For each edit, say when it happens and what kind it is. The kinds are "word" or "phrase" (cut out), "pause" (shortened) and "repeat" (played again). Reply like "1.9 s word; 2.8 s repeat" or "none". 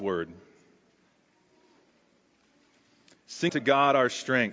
3.5 s word

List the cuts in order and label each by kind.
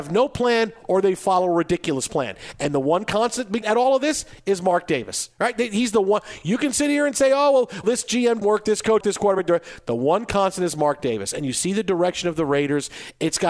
3.6 s word; 7.8 s word; 8.4 s word; 9.0 s phrase

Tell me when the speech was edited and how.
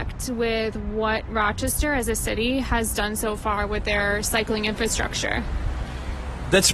none

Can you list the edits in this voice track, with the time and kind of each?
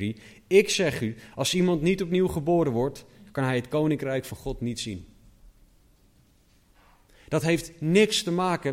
none

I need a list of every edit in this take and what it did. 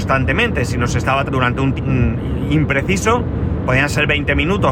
1.3 s word; 1.8 s word

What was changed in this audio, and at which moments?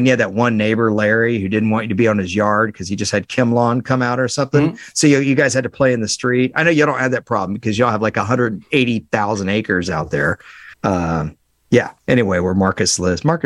10.7 s pause; 12.0 s pause

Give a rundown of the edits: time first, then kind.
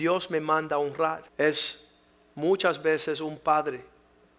1.3 s pause

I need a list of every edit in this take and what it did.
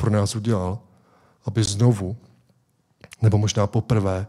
none

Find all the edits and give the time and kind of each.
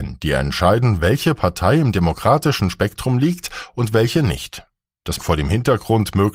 5.2 s word

